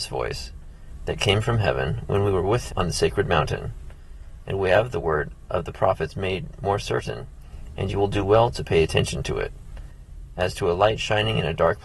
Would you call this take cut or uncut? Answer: cut